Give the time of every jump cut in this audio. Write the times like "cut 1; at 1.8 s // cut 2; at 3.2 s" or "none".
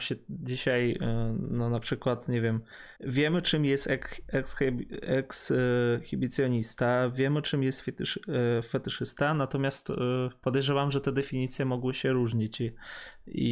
cut 1; at 3.0 s